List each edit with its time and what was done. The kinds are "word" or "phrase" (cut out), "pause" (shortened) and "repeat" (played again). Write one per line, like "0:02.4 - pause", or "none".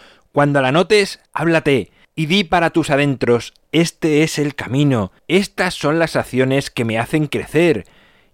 0:01.3 - pause
0:05.2 - pause